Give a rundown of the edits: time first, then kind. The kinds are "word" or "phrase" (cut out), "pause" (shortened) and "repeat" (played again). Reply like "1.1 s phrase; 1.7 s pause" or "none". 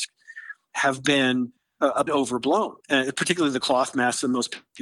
2.1 s word; 2.8 s pause